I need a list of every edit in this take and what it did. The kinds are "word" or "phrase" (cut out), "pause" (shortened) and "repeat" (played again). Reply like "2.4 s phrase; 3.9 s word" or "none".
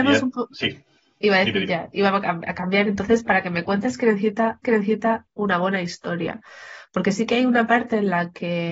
4.6 s repeat